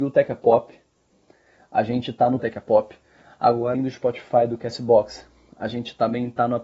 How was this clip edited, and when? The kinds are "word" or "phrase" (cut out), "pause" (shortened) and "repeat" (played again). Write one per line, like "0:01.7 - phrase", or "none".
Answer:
0:02.4 - phrase
0:03.7 - word